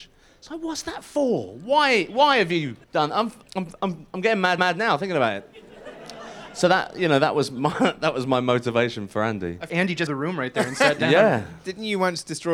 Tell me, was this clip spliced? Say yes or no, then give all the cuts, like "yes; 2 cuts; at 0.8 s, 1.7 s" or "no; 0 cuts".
yes; 5 cuts; at 2.8 s, 3.4 s, 4.6 s, 9.7 s, 10.1 s